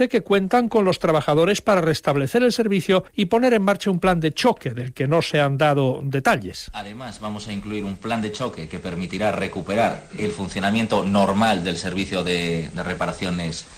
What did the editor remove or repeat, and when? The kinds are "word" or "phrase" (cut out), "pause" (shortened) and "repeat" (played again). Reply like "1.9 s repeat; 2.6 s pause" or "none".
3.1 s pause